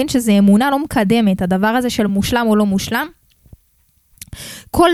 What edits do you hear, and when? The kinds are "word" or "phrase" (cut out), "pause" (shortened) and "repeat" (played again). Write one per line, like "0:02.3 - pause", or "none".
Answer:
none